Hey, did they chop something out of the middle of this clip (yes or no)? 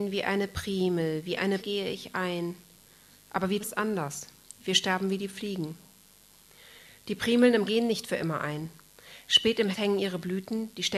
yes